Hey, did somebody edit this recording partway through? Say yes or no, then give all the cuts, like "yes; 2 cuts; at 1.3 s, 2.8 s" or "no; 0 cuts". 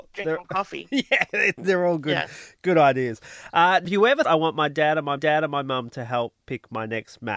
yes; 3 cuts; at 3.8 s, 4.2 s, 5.2 s